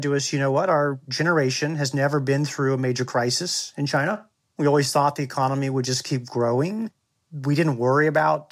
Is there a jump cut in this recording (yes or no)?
no